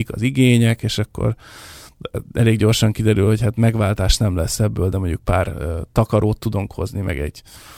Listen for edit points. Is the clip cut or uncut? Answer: uncut